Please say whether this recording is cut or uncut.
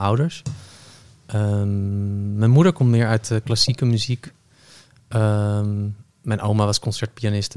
uncut